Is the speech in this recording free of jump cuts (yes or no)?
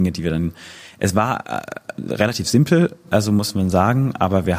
yes